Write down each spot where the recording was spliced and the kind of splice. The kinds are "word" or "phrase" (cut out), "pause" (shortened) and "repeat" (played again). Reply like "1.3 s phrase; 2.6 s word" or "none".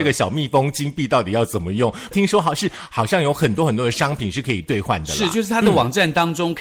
2.1 s phrase